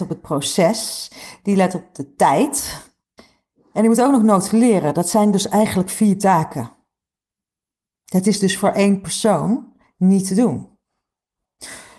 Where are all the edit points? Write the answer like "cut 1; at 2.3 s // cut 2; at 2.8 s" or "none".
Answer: cut 1; at 3.2 s